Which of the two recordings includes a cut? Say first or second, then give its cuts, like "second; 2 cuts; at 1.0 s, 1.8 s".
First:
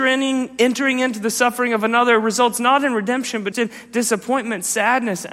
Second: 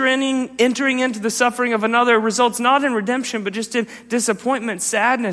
first; 1 cut; at 3.5 s